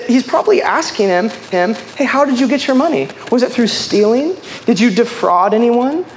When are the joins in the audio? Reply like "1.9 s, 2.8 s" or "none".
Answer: 1.5 s